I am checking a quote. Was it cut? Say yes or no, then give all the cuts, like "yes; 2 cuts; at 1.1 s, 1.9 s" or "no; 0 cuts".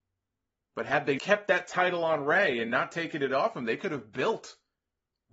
yes; 1 cut; at 1.2 s